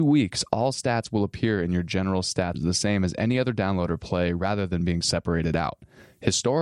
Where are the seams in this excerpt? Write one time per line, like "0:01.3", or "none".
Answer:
0:02.5